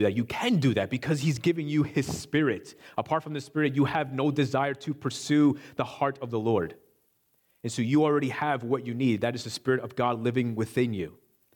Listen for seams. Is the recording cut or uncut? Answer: uncut